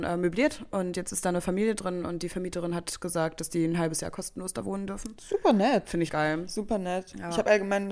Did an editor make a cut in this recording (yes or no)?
yes